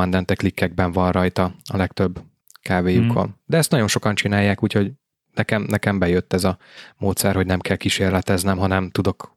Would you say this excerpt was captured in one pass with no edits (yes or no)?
yes